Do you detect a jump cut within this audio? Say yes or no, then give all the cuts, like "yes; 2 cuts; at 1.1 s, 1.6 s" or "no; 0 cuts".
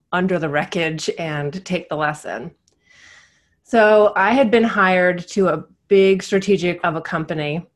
yes; 1 cut; at 6.8 s